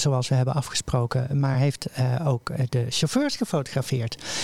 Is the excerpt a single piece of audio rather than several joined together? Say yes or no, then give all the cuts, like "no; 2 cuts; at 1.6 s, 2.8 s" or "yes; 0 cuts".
yes; 0 cuts